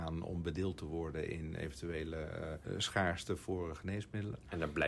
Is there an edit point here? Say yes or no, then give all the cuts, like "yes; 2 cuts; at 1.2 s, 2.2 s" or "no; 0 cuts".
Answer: no; 0 cuts